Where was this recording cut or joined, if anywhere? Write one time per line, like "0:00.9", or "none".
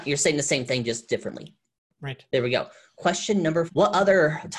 0:03.7